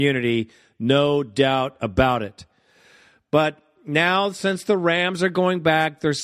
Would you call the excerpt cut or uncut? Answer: uncut